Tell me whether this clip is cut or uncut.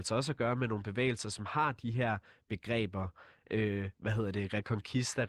uncut